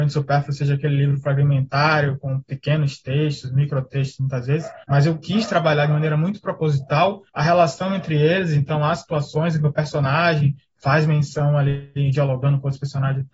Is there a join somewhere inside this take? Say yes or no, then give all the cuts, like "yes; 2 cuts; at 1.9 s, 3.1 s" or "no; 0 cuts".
yes; 2 cuts; at 4.8 s, 7.3 s